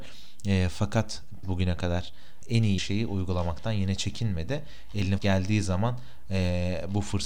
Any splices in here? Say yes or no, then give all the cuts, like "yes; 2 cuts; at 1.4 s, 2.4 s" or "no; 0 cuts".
yes; 4 cuts; at 1.4 s, 2.4 s, 2.8 s, 5.2 s